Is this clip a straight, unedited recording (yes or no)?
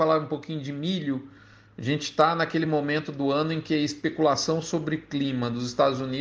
yes